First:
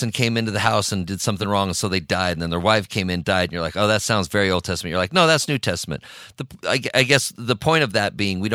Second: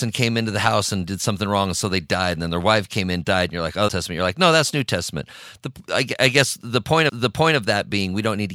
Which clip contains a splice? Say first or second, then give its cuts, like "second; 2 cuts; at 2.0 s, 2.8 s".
second; 2 cuts; at 3.9 s, 7.1 s